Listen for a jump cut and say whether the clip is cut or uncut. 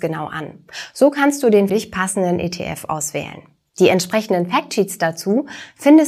cut